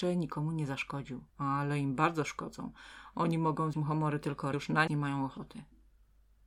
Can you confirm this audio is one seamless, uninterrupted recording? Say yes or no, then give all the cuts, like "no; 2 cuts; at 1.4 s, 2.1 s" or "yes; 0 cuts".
no; 4 cuts; at 1.3 s, 3.7 s, 4.5 s, 4.9 s